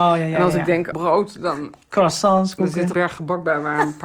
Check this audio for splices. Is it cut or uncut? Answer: cut